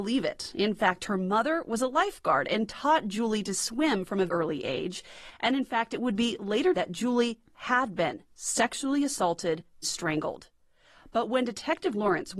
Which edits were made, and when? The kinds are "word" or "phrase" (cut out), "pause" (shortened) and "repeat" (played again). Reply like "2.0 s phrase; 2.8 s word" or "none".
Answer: 4.3 s word; 6.7 s word; 9.8 s word